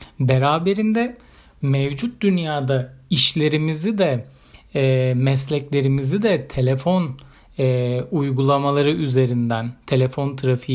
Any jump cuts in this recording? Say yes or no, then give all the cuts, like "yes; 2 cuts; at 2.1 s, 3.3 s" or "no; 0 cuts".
no; 0 cuts